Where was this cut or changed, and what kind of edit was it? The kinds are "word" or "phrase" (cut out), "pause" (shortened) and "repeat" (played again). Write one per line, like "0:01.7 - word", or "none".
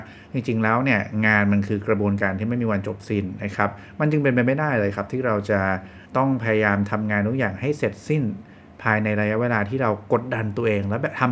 0:06.1 - pause